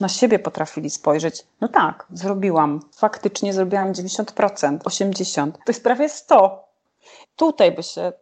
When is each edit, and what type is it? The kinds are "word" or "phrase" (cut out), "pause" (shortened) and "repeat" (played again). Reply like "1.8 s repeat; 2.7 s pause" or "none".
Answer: 2.1 s phrase; 4.8 s word; 5.6 s pause